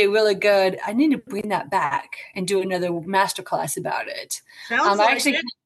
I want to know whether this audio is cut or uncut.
uncut